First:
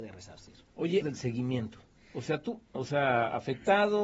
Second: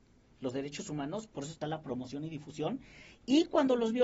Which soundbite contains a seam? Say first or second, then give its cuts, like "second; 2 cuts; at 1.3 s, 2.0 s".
first; 2 cuts; at 1.0 s, 2.0 s